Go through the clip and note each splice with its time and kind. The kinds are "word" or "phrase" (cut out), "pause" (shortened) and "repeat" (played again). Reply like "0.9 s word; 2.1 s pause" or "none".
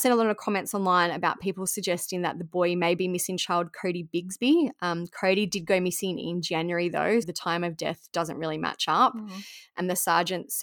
7.2 s word